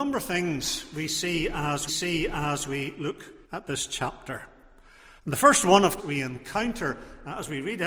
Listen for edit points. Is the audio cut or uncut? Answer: cut